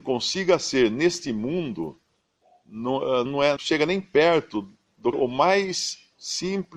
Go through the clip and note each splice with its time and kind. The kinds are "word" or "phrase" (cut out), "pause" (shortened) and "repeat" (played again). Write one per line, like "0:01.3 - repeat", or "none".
0:03.3 - word
0:03.6 - word
0:05.1 - word